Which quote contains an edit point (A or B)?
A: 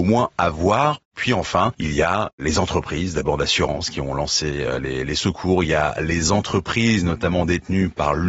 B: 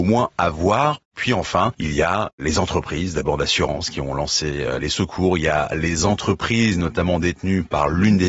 B